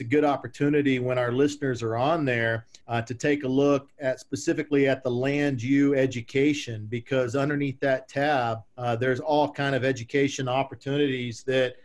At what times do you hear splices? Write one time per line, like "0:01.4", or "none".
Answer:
0:02.8
0:08.7